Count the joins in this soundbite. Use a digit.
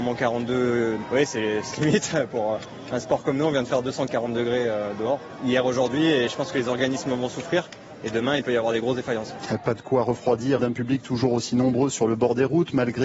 3